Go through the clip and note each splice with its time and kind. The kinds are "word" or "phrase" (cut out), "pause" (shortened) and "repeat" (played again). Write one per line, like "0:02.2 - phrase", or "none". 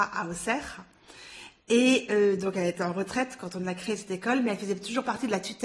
none